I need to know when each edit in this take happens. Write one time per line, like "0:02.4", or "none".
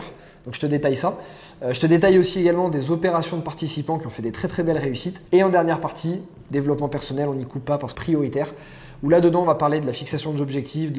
0:05.3
0:07.9